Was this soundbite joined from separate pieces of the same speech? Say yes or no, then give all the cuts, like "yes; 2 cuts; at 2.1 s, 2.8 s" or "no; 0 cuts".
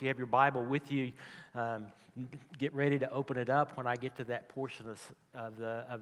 no; 0 cuts